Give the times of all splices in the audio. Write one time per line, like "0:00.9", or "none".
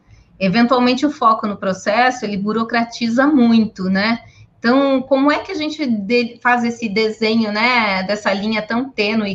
none